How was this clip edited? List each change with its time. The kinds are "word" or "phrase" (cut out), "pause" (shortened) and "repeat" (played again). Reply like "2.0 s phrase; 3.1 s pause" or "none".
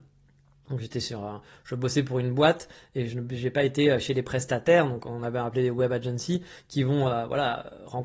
none